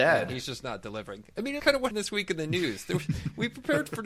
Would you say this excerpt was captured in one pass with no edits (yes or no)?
no